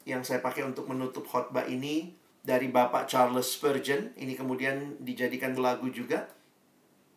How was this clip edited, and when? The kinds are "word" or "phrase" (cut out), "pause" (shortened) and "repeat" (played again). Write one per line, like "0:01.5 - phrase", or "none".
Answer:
0:02.3 - pause
0:05.6 - word